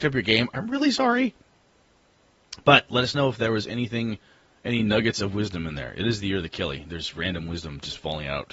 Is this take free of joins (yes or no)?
yes